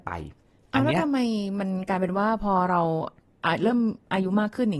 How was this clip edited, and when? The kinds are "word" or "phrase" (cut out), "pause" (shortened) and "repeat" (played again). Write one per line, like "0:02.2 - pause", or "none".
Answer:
none